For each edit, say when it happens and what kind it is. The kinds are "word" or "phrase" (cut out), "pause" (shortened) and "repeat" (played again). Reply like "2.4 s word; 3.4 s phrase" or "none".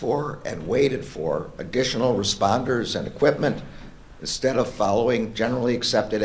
none

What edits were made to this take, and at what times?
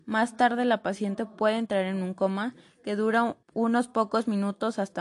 3.4 s pause

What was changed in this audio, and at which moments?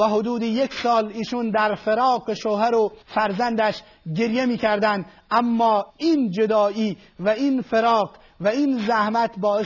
3.0 s pause; 5.9 s pause

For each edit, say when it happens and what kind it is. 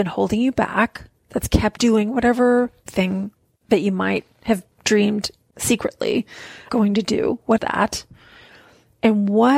1.2 s pause; 1.8 s phrase; 2.9 s word; 4.7 s pause; 6.7 s word; 7.6 s word

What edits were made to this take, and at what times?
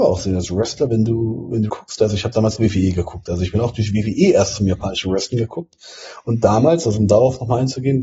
1.7 s word; 2.6 s word

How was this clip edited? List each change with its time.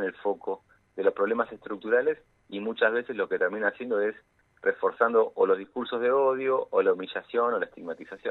none

